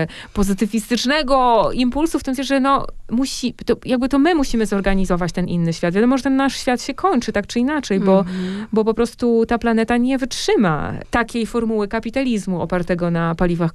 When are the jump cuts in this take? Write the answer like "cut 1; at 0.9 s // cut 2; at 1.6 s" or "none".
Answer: cut 1; at 2.4 s